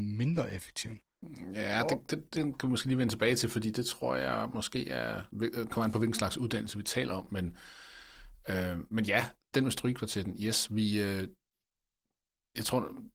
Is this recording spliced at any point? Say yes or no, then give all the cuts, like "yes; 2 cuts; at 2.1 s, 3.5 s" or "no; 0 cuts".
yes; 1 cut; at 5.3 s